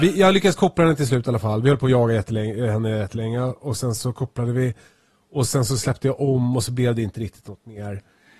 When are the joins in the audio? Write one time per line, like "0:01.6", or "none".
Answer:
none